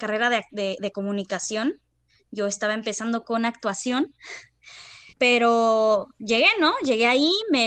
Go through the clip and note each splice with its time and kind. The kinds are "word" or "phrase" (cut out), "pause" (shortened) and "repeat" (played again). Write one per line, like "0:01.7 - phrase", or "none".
0:05.1 - pause